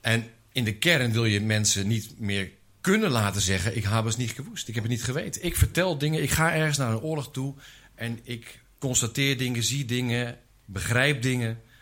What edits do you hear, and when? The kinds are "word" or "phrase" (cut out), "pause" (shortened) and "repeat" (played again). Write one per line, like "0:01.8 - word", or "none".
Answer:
none